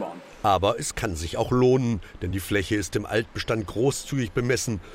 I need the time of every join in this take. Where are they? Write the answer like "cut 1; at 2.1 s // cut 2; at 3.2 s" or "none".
none